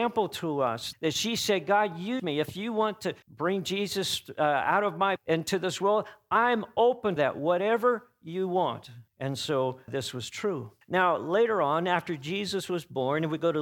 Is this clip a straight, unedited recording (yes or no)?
no